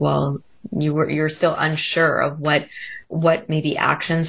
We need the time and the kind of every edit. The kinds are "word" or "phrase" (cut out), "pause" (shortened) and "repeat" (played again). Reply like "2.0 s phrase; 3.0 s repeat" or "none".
3.0 s pause